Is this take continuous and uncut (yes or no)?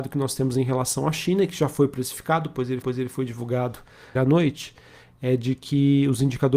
no